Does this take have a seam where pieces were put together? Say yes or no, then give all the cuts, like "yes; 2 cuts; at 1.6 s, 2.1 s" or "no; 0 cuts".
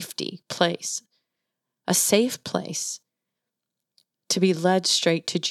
no; 0 cuts